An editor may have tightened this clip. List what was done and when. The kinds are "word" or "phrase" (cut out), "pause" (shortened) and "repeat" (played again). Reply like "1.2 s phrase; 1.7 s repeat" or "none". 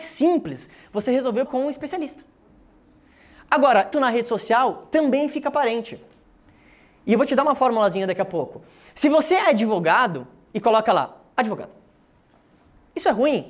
1.5 s word; 3.9 s word